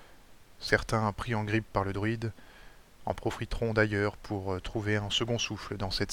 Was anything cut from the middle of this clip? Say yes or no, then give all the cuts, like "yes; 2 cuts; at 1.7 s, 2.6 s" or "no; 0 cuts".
no; 0 cuts